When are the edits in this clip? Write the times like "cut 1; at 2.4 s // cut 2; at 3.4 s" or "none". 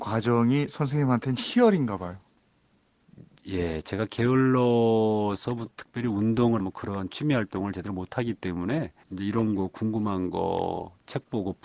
cut 1; at 6.6 s // cut 2; at 9.0 s